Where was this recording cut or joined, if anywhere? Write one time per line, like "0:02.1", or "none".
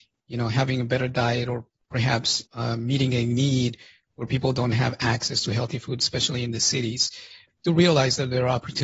none